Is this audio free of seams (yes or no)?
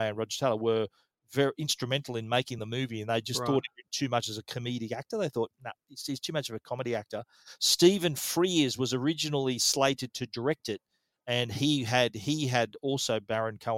yes